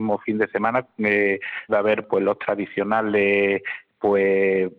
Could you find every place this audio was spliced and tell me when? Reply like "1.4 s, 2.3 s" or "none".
1.7 s

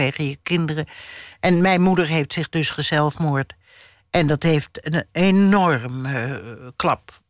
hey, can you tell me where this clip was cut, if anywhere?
none

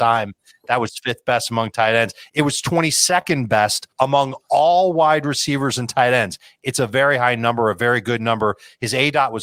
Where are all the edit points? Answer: 3.9 s

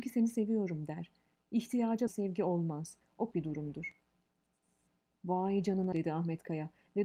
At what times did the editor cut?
2.1 s, 3.3 s, 5.9 s

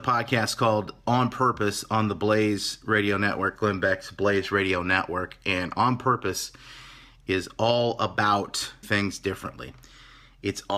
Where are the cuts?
8.8 s

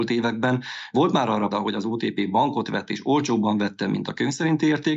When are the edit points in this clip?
1.5 s

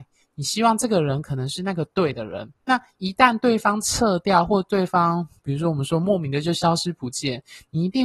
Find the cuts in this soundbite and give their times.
2.6 s

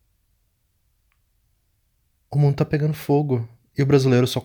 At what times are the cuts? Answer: none

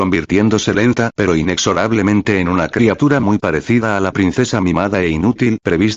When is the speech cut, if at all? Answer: none

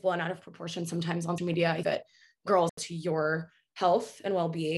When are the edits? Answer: 1.4 s, 1.8 s, 2.7 s

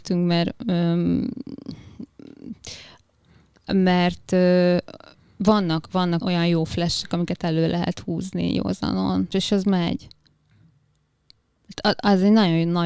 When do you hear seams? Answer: 6.2 s, 9.3 s

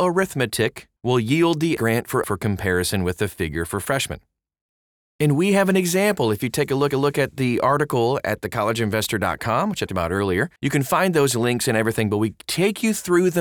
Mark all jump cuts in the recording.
1.0 s, 1.8 s, 2.2 s, 6.9 s, 9.9 s, 10.6 s

